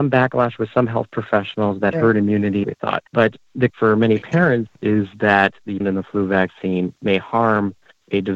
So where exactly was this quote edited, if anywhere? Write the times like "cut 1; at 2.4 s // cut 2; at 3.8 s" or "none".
cut 1; at 1.9 s // cut 2; at 2.6 s // cut 3; at 3.1 s // cut 4; at 3.7 s // cut 5; at 5.8 s